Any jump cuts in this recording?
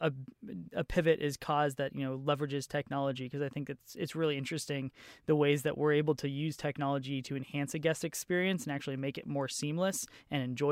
no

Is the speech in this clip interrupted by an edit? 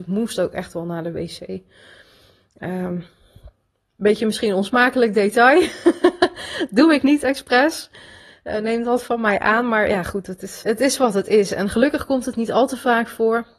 yes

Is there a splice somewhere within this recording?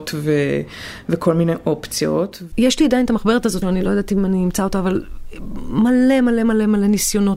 yes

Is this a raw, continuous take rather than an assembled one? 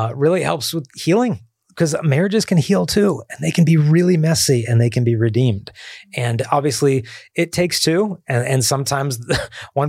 yes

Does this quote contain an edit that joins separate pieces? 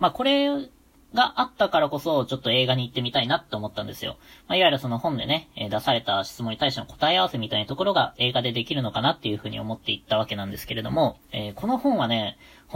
yes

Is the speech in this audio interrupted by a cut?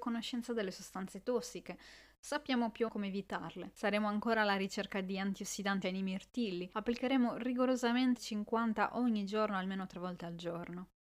yes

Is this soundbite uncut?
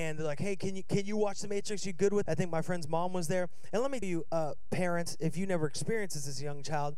no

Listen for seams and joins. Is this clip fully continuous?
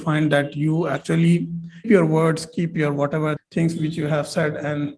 no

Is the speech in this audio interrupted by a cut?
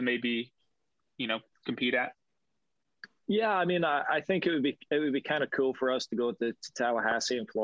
no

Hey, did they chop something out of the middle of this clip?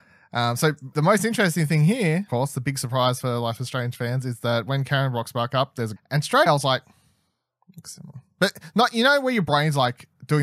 yes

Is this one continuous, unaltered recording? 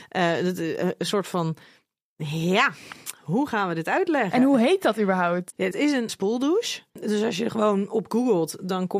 no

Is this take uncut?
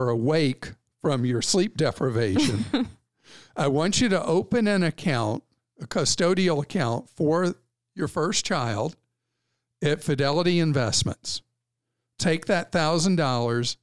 yes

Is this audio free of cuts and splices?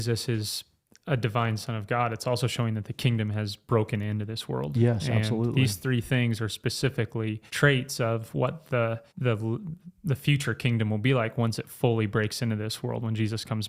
no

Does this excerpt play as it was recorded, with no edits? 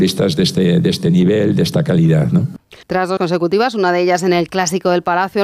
no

